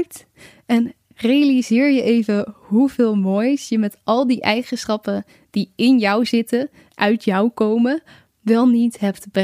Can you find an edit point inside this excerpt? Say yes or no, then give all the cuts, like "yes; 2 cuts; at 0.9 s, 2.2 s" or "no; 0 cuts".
no; 0 cuts